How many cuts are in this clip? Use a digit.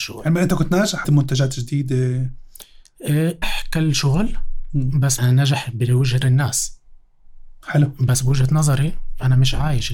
4